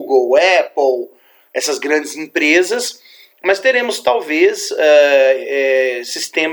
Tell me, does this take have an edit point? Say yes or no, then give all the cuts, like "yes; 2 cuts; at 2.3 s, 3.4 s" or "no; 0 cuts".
no; 0 cuts